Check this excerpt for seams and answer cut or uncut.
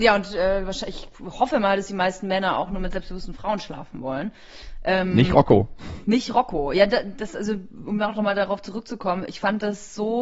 uncut